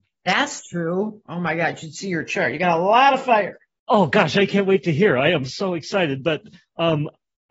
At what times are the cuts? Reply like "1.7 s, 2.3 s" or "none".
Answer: none